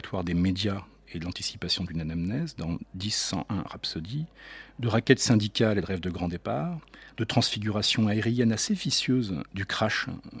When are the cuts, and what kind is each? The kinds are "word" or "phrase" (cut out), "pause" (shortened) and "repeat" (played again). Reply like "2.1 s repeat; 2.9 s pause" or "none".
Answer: none